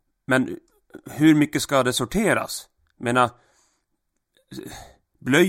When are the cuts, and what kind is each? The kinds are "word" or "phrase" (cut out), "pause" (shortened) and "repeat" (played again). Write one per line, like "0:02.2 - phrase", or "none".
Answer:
none